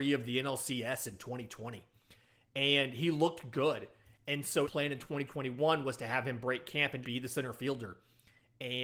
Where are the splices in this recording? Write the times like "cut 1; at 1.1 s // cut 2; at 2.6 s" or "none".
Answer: cut 1; at 4.6 s // cut 2; at 7.0 s